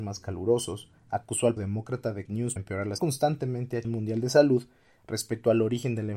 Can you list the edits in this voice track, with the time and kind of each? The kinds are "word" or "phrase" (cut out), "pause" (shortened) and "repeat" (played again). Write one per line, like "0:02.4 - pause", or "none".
0:01.0 - pause
0:01.6 - word
0:02.3 - phrase
0:02.6 - word
0:03.0 - phrase
0:03.8 - phrase